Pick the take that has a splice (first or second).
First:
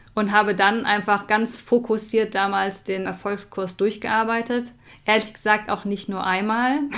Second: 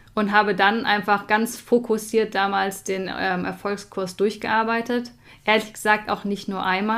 first